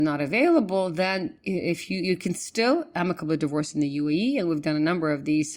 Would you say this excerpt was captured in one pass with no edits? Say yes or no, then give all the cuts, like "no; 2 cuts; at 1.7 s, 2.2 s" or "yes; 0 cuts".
yes; 0 cuts